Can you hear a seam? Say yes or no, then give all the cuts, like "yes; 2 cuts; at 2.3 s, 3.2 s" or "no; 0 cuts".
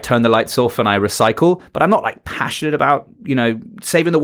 yes; 1 cut; at 3.1 s